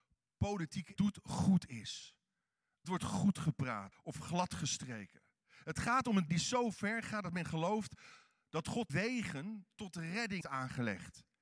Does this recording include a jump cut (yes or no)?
yes